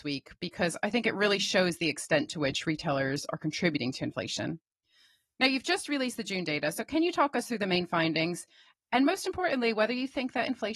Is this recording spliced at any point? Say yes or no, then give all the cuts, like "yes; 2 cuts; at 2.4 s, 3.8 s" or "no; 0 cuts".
no; 0 cuts